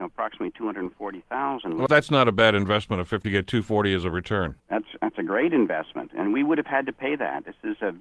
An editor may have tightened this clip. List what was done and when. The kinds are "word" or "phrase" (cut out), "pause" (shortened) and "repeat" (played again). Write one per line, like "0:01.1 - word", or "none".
0:01.9 - word
0:03.2 - phrase
0:04.6 - pause